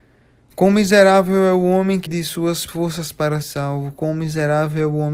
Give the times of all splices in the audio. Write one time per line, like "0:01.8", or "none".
0:02.1
0:02.7
0:03.4